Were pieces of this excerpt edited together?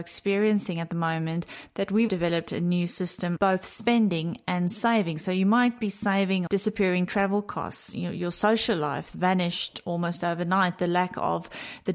yes; 4 cuts; at 2.1 s, 3.4 s, 6.5 s, 9.1 s

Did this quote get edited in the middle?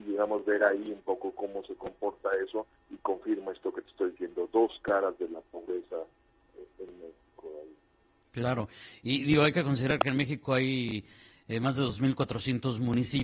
no; 0 cuts

